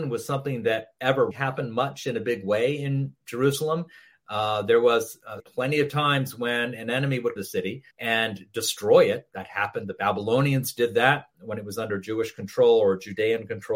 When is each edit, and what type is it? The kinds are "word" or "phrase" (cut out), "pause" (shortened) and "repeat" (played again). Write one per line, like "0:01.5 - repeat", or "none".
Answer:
0:01.3 - word
0:05.4 - word
0:07.4 - phrase
0:07.9 - pause